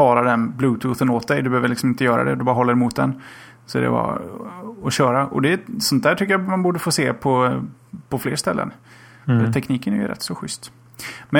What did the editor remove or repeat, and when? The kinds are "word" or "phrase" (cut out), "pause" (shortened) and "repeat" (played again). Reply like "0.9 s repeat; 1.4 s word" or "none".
none